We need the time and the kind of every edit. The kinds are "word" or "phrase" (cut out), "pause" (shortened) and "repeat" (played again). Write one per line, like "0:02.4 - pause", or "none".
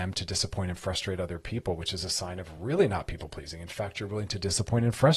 none